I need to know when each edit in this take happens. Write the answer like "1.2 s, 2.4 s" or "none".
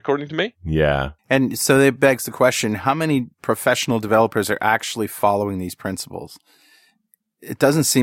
1.2 s, 3.3 s